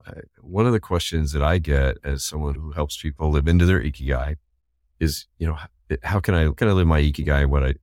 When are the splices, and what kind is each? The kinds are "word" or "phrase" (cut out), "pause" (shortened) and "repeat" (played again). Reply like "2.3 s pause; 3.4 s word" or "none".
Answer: 2.6 s word; 6.6 s word